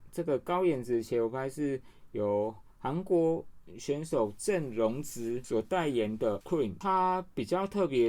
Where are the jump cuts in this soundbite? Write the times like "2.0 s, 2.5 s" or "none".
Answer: 6.4 s